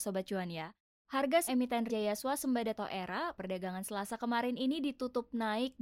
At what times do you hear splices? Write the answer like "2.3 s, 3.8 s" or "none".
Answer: 1.5 s, 1.9 s, 2.7 s, 3.4 s